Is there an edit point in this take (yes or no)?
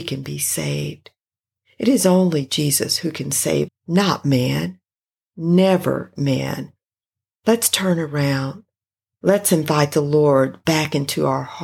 yes